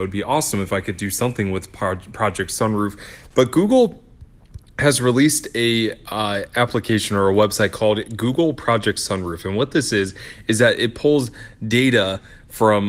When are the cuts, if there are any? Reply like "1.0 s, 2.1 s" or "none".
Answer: none